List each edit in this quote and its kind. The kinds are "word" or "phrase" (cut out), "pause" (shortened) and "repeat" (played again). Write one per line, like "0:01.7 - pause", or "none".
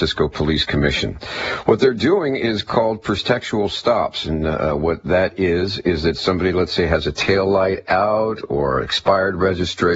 none

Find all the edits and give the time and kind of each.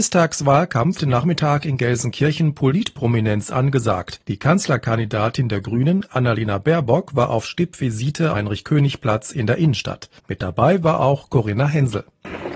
0:01.0 - phrase
0:04.2 - pause
0:08.3 - phrase
0:10.2 - pause

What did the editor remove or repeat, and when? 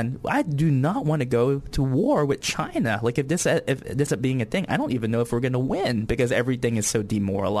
0:04.1 - word

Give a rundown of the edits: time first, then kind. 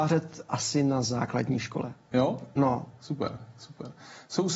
none

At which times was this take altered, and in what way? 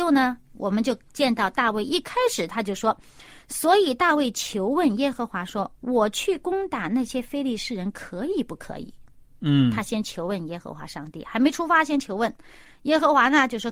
none

